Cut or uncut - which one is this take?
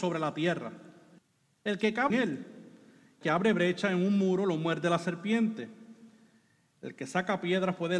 cut